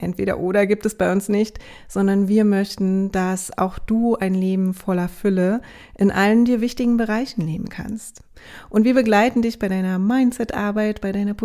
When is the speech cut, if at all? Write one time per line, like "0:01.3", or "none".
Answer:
none